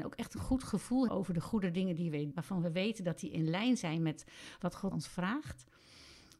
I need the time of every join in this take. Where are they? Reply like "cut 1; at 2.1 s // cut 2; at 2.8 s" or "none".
cut 1; at 1.1 s // cut 2; at 2.3 s // cut 3; at 4.9 s